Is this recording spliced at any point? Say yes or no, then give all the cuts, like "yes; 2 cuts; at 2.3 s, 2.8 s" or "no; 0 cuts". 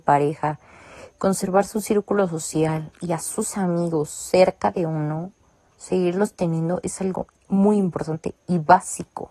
no; 0 cuts